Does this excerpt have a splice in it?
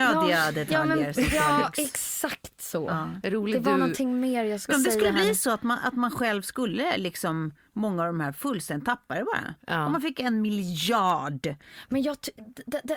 yes; 1 cut; at 4.7 s

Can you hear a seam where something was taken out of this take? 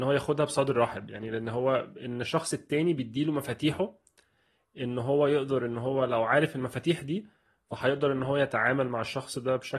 no; 0 cuts

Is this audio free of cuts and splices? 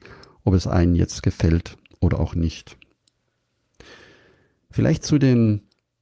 yes; 0 cuts

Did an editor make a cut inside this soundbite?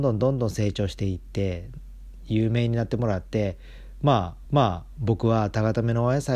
yes; 1 cut; at 4.5 s

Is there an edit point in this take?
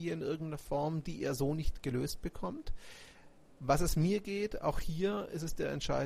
no; 0 cuts

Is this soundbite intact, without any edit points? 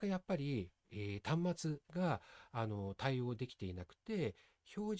no; 1 cut; at 1.8 s

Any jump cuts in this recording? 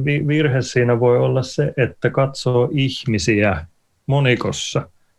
no; 0 cuts

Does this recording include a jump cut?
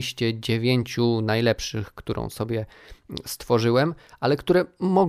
no; 0 cuts

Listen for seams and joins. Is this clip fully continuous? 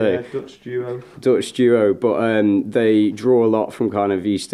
yes; 0 cuts

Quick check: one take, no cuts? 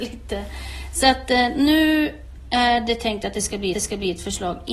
no; 1 cut; at 3.7 s

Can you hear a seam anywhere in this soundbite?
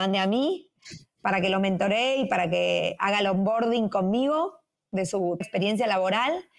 yes; 1 cut; at 5.4 s

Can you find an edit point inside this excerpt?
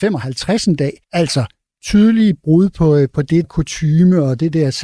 yes; 2 cuts; at 1.0 s, 3.4 s

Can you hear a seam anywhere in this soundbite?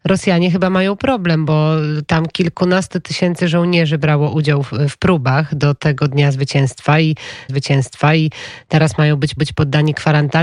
yes; 2 cuts; at 7.5 s, 9.4 s

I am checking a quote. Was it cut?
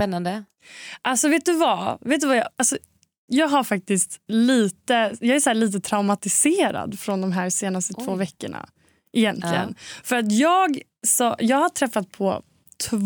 no; 0 cuts

